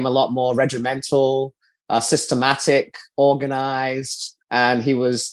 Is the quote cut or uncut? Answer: cut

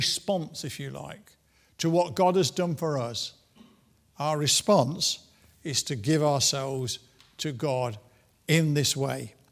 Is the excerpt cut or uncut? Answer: uncut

